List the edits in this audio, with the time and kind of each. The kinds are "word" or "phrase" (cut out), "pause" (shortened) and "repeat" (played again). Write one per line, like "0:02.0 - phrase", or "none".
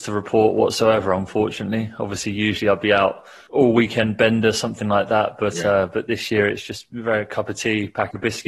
none